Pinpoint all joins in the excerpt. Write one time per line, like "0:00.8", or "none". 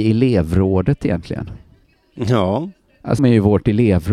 0:03.2